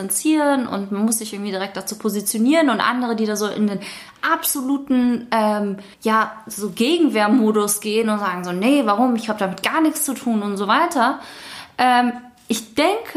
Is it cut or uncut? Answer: cut